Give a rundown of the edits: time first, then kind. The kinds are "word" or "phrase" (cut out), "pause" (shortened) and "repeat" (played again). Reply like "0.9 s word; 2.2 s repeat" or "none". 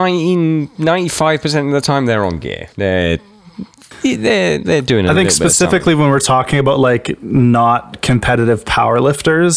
2.7 s pause